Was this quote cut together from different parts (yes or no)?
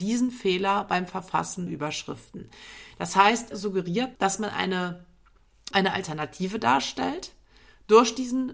yes